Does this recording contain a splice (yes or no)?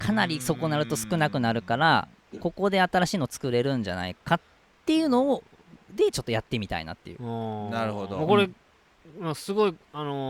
yes